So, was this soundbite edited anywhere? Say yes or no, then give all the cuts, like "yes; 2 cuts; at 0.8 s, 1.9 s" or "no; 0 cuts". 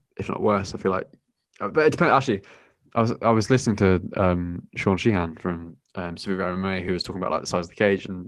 no; 0 cuts